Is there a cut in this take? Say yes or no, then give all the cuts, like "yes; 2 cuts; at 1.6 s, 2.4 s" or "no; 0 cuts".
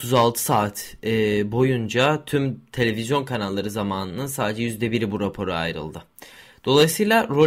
no; 0 cuts